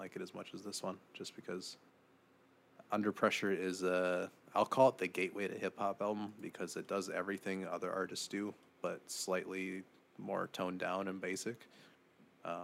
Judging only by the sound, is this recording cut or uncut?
uncut